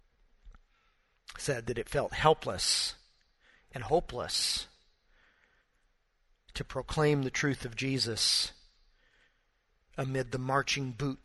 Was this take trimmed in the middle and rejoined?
no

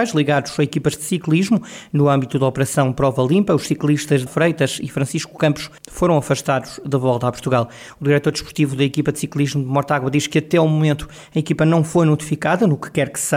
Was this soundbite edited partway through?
yes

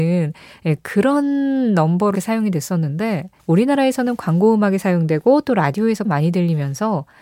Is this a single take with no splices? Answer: no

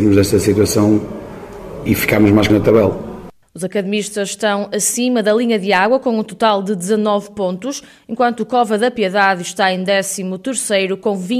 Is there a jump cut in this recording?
yes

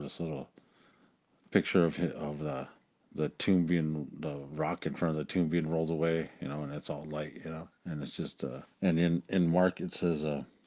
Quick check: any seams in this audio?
yes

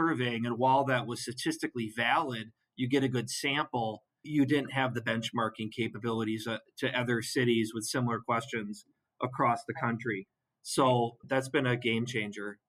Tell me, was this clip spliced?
no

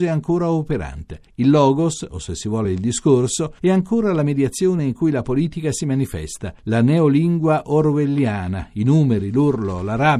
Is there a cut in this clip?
no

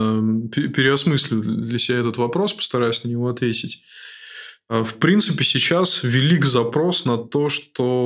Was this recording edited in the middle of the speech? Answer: no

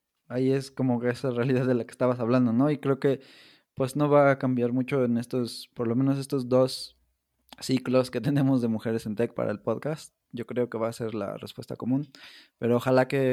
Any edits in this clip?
no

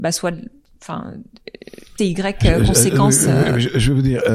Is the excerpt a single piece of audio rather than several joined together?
no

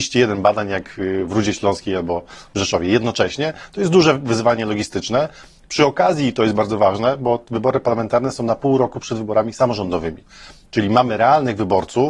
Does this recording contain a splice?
no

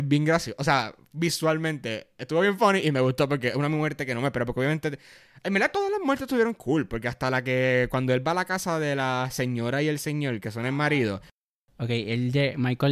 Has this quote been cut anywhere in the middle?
no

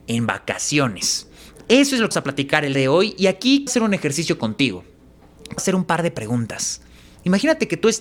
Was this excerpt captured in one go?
no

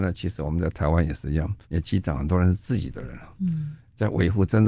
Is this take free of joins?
no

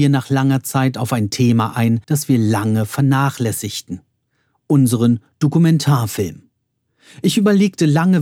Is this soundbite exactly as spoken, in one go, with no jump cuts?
no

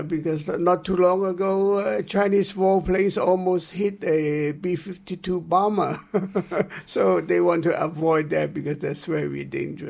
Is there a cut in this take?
no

